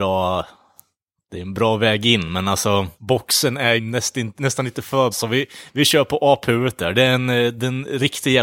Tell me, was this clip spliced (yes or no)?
yes